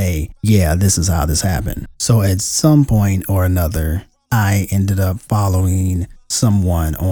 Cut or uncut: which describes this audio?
uncut